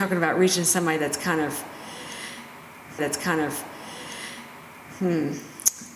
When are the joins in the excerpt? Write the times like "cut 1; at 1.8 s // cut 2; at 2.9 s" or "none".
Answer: cut 1; at 3.0 s